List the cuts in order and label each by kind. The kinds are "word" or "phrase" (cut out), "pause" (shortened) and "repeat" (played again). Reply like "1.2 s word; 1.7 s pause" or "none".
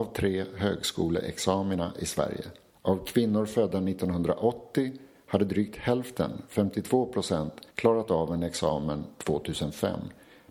2.7 s pause; 7.7 s pause